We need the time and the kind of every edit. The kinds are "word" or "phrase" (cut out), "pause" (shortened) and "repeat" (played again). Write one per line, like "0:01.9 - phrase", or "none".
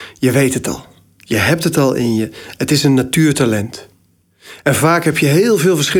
none